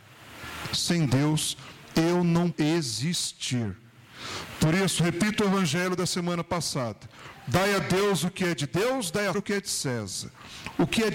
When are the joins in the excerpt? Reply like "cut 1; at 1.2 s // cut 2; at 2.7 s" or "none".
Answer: cut 1; at 2.5 s // cut 2; at 9.3 s